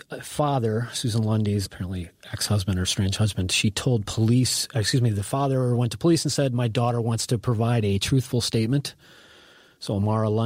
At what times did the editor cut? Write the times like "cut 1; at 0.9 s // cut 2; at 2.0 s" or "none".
cut 1; at 1.7 s